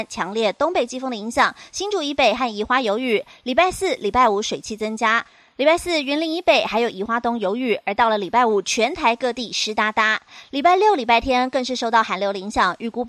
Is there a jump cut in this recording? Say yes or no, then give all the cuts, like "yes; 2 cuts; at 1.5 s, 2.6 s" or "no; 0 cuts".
no; 0 cuts